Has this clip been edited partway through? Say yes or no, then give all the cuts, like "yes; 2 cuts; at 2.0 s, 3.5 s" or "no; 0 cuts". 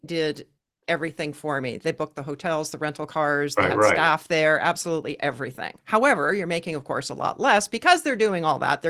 no; 0 cuts